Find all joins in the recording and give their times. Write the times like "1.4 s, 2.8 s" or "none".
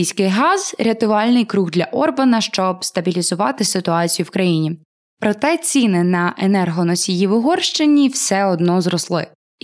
none